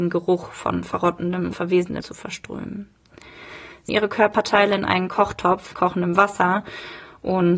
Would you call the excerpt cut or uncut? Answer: cut